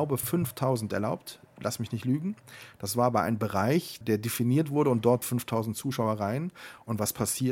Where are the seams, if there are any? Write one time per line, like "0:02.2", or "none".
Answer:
0:04.0
0:05.2